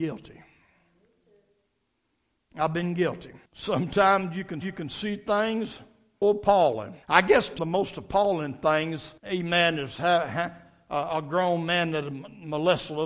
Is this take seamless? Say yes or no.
no